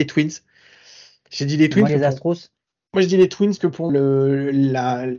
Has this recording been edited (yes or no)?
yes